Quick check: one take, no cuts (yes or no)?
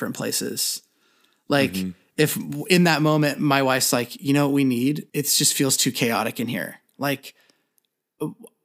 no